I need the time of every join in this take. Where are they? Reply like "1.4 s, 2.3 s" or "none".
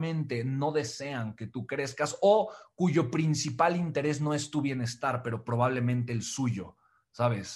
none